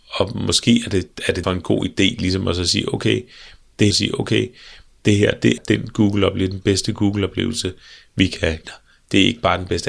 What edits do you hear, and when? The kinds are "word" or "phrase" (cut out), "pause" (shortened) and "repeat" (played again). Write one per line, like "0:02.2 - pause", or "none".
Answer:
0:01.4 - word
0:03.9 - repeat
0:05.6 - word
0:08.6 - word

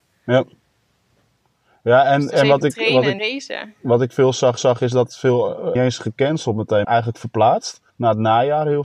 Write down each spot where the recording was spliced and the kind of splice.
0:03.2 - word
0:04.6 - repeat
0:05.8 - phrase
0:06.8 - word
0:07.9 - pause

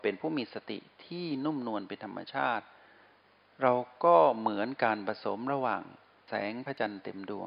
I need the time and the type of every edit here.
none

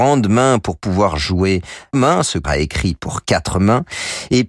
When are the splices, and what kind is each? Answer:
0:01.9 - phrase
0:02.4 - word

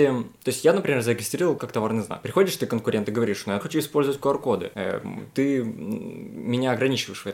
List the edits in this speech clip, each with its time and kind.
0:01.6 - word
0:03.6 - word

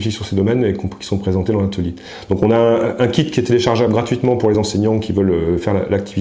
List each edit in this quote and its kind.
none

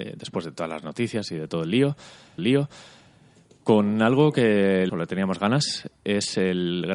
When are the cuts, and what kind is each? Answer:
0:02.4 - repeat
0:04.9 - phrase

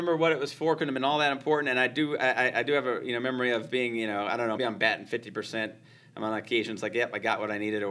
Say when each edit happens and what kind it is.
0:04.6 - word

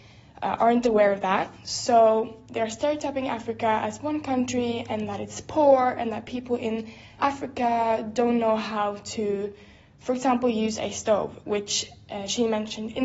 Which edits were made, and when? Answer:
0:07.2 - word

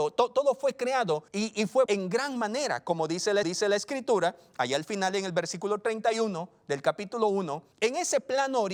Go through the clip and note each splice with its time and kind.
0:01.3 - pause
0:01.9 - word
0:03.4 - repeat
0:07.7 - pause

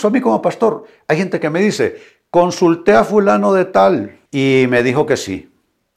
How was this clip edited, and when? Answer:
0:04.3 - pause

